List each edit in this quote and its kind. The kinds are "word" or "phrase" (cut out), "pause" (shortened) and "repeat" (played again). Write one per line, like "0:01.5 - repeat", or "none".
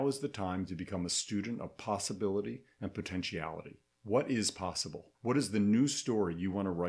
0:05.1 - pause